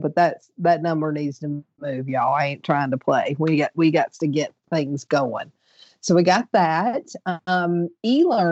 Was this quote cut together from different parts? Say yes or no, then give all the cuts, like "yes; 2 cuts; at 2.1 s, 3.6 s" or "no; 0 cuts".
no; 0 cuts